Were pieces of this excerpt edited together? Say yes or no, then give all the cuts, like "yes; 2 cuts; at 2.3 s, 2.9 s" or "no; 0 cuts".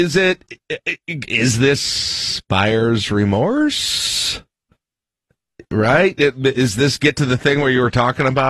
no; 0 cuts